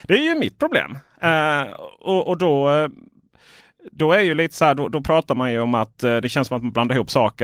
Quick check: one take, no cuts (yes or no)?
yes